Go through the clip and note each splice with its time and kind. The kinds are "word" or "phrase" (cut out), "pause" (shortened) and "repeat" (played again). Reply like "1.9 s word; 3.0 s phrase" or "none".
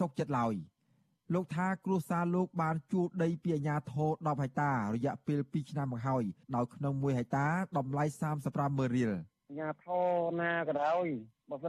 6.4 s pause